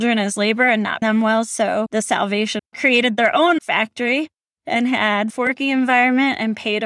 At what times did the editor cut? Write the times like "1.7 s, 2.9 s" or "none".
1.0 s, 2.6 s, 3.6 s, 5.3 s